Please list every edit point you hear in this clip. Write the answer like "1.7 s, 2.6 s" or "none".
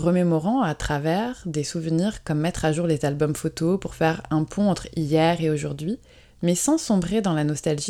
none